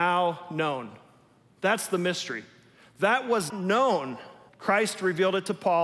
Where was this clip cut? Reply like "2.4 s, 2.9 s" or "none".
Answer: 3.5 s, 4.5 s